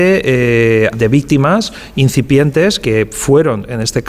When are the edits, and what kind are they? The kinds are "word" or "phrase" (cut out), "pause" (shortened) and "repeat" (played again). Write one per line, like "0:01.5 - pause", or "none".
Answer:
0:00.9 - phrase